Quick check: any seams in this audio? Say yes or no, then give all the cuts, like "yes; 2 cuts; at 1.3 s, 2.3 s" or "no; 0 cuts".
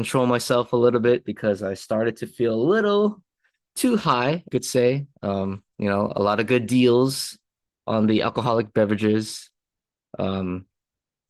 yes; 2 cuts; at 4.5 s, 5.7 s